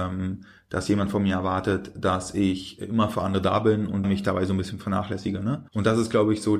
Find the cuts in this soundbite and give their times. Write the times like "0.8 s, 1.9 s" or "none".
4.0 s, 5.7 s